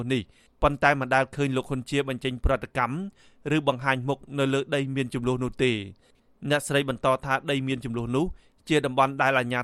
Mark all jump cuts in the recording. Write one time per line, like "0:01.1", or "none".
none